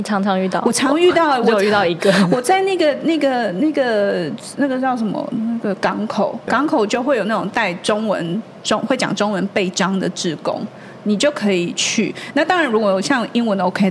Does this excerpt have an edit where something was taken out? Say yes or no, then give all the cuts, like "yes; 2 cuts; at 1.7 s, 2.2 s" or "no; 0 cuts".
yes; 1 cut; at 6.5 s